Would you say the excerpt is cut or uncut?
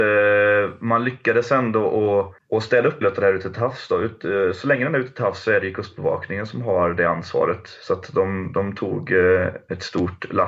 cut